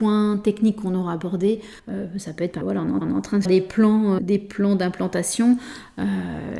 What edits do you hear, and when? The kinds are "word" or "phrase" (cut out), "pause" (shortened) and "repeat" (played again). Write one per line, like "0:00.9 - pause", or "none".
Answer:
0:01.8 - pause
0:02.6 - word
0:03.0 - repeat
0:03.4 - word
0:04.2 - word